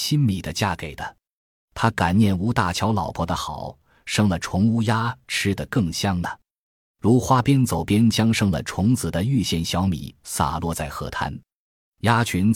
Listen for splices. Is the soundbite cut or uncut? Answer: uncut